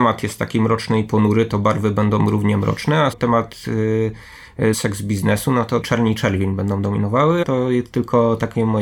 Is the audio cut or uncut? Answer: cut